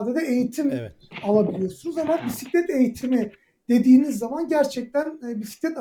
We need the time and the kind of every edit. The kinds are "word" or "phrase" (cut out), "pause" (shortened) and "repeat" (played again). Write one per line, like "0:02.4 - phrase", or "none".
none